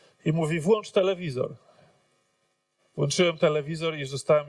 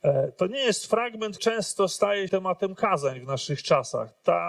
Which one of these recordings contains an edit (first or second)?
second